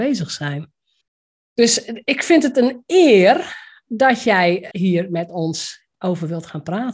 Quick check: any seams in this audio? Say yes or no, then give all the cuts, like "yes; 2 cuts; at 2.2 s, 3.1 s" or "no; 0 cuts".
yes; 2 cuts; at 1.0 s, 4.7 s